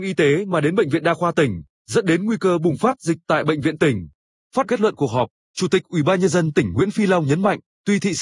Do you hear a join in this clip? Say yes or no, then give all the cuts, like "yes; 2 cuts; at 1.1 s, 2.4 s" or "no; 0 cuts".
yes; 1 cut; at 4.6 s